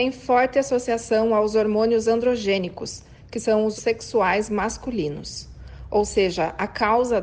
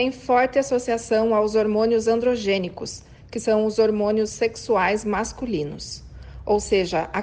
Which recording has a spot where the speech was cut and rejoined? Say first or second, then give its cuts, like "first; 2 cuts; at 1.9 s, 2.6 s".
first; 1 cut; at 3.8 s